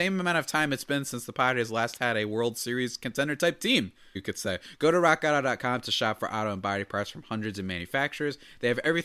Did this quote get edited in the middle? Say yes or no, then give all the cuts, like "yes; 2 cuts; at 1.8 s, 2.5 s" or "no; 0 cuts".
yes; 1 cut; at 4.2 s